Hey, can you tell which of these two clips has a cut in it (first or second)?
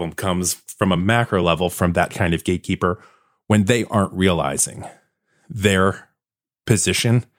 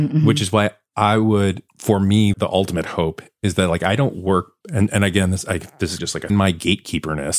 second